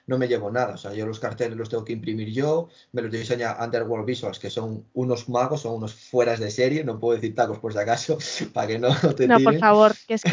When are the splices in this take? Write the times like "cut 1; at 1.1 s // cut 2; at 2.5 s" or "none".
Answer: none